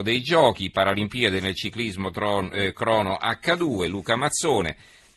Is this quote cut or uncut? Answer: uncut